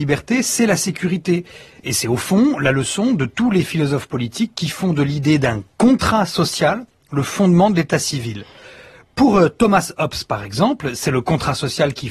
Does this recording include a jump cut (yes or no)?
no